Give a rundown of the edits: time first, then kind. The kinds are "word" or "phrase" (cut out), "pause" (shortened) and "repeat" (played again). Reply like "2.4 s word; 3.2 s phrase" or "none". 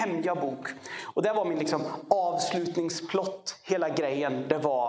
none